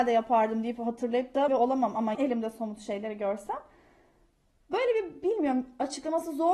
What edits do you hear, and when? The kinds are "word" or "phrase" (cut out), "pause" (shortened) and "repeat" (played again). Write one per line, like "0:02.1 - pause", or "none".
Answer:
0:01.5 - word
0:02.1 - word